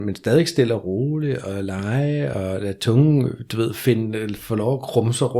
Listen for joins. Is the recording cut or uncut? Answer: uncut